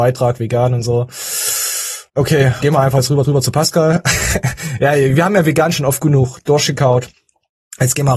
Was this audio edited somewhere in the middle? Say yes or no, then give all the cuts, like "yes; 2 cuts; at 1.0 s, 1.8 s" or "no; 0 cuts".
yes; 3 cuts; at 2.1 s, 2.6 s, 3.2 s